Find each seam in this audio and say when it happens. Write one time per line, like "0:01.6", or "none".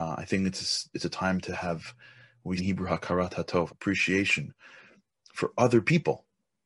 0:00.9
0:02.6
0:03.7